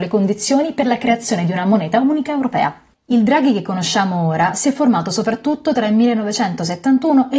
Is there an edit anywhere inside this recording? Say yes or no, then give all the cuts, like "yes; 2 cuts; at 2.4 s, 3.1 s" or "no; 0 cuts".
no; 0 cuts